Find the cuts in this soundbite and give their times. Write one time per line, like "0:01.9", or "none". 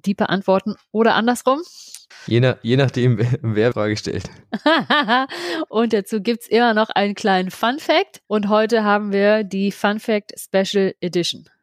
0:02.1
0:03.7
0:08.2